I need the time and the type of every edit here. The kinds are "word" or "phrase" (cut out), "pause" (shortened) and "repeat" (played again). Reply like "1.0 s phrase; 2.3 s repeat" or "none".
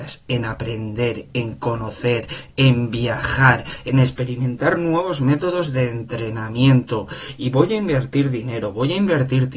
none